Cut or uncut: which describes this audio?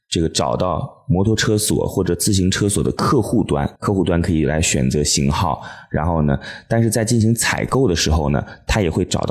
cut